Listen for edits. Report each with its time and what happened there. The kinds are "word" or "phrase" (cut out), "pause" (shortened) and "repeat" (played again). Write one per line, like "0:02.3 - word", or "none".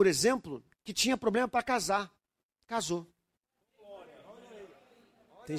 none